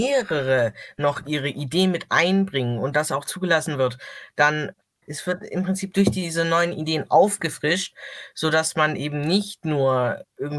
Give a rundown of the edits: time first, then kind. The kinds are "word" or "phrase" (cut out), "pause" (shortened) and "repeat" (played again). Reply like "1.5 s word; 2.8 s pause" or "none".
none